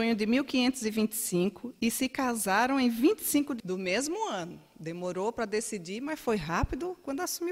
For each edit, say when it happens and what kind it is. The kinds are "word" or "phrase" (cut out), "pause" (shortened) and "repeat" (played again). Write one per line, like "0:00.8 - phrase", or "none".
0:03.6 - word